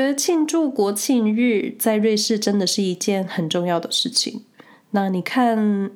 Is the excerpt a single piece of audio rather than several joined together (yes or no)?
yes